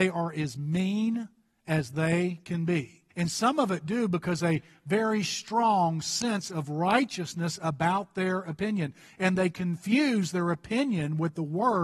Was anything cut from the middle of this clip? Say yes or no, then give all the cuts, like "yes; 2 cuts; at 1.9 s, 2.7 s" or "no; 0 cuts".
yes; 1 cut; at 3.1 s